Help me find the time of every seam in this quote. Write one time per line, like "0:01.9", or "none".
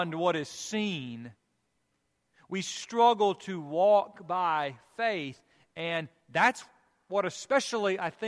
none